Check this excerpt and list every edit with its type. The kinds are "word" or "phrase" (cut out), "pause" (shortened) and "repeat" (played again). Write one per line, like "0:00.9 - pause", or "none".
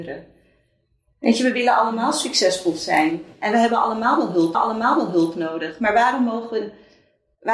0:04.5 - repeat